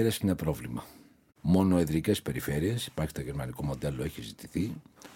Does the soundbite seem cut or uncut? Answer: uncut